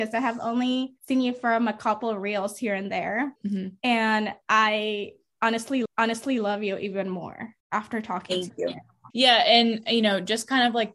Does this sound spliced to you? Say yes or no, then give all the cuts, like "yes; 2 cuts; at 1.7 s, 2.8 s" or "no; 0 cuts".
yes; 6 cuts; at 1.0 s, 3.4 s, 4.4 s, 5.9 s, 7.6 s, 9.1 s